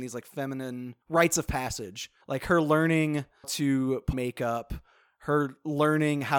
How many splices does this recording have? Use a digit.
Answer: 4